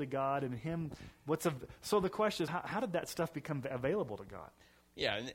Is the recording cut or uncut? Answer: cut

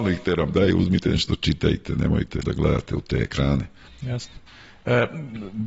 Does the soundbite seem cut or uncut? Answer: cut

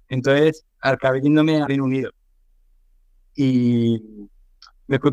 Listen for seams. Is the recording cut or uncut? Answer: cut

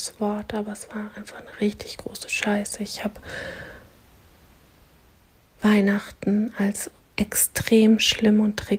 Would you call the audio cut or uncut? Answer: uncut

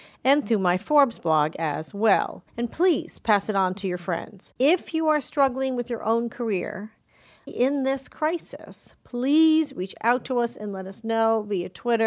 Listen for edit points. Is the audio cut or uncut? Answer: cut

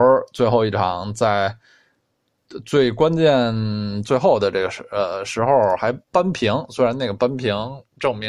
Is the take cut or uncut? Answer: cut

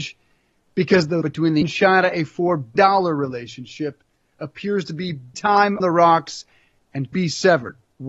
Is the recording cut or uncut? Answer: cut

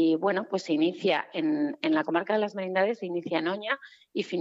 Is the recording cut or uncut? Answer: uncut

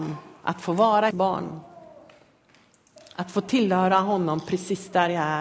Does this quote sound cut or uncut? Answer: cut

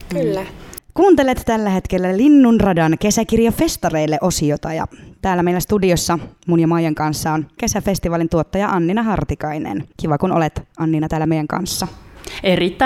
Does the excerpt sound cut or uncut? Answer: cut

